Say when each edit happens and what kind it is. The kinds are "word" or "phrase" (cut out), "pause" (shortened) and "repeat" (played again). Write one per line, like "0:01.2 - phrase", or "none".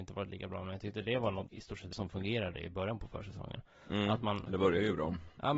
0:01.5 - word
0:01.9 - word